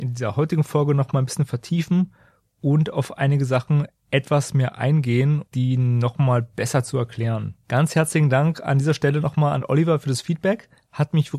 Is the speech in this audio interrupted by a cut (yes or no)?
yes